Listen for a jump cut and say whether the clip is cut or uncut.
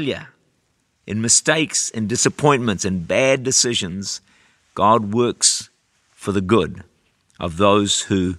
uncut